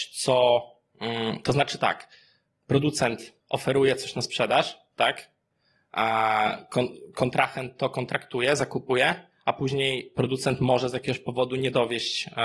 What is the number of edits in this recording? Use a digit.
1